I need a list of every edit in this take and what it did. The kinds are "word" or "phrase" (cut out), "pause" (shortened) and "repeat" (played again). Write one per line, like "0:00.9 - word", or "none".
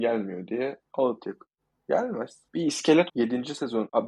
0:02.5 - pause
0:03.1 - word